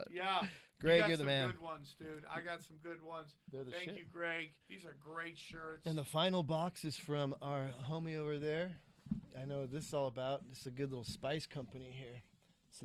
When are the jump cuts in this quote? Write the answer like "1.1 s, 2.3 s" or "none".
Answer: 4.6 s